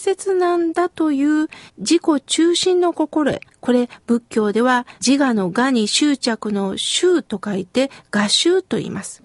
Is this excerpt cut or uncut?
cut